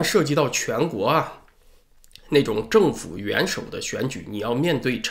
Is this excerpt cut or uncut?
uncut